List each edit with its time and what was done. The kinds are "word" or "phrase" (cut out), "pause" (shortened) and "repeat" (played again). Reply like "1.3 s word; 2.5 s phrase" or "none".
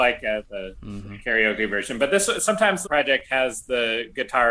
2.8 s phrase